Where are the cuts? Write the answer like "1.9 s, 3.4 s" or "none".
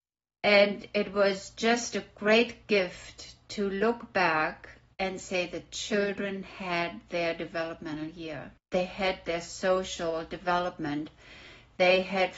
8.6 s

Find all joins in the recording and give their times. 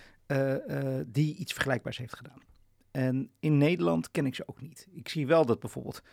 none

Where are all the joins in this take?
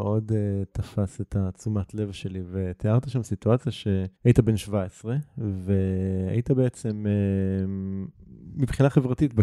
4.2 s

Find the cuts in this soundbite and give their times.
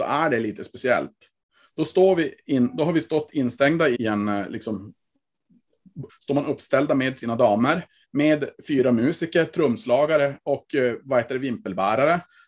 3.9 s, 6.1 s

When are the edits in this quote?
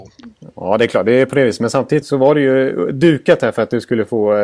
2.0 s

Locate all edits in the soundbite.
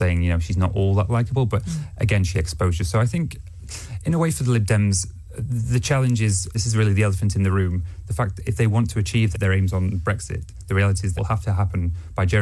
2.3 s, 6.5 s, 9.3 s, 11.2 s

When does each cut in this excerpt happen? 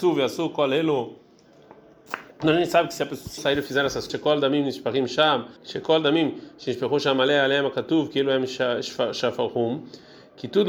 2.3 s, 3.4 s, 4.1 s, 5.6 s

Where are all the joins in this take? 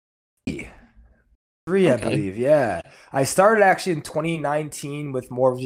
none

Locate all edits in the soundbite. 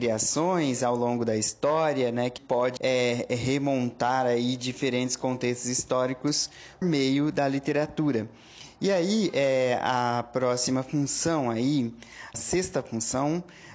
2.4 s, 2.8 s, 6.8 s, 12.3 s

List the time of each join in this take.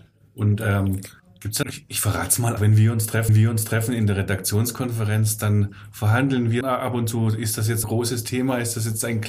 1.2 s, 1.6 s, 2.6 s, 3.3 s, 6.6 s, 7.8 s

